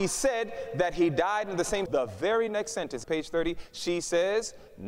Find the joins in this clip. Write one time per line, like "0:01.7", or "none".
0:01.9
0:03.0